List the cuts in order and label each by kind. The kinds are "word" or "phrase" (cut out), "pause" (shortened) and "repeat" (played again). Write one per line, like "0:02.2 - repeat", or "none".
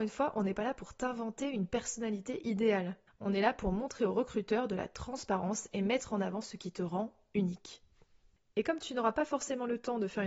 none